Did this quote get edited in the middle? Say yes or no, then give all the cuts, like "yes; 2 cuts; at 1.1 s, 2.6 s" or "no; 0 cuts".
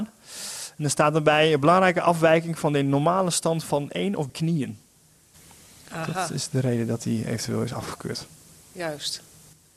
yes; 1 cut; at 4.3 s